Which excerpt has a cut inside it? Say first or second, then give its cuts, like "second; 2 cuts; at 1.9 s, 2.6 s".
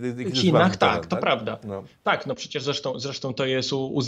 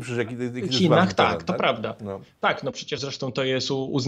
second; 1 cut; at 3.0 s